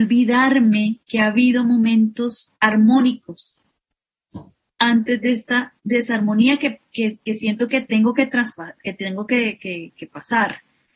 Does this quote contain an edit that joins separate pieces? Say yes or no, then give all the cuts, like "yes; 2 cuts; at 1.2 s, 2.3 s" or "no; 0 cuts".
yes; 4 cuts; at 1.0 s, 2.6 s, 5.8 s, 8.8 s